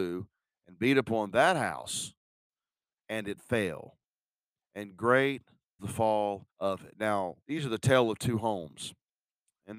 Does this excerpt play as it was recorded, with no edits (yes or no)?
no